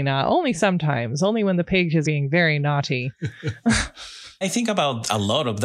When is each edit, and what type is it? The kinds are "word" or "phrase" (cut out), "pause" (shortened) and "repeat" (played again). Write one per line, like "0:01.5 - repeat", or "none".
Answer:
0:02.0 - word
0:04.4 - word